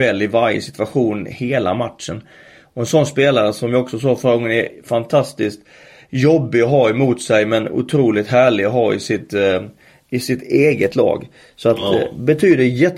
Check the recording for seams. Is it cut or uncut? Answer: uncut